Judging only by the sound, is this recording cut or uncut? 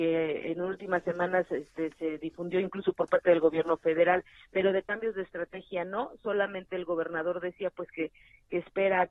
uncut